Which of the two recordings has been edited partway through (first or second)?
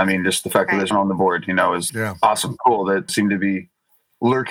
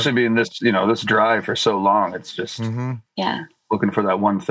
first